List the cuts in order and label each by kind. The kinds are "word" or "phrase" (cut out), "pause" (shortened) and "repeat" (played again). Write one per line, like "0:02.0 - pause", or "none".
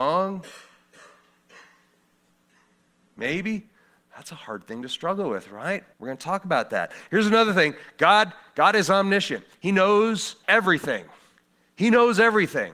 0:05.9 - pause
0:10.4 - pause